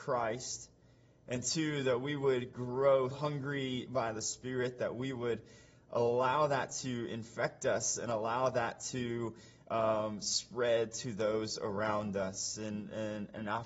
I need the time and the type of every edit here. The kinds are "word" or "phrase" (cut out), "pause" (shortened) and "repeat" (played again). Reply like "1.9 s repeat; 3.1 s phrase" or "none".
3.1 s word